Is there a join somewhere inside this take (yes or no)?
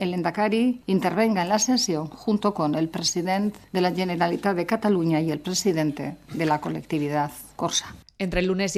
no